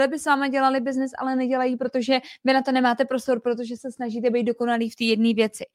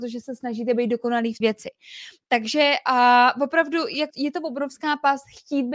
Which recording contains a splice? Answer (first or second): second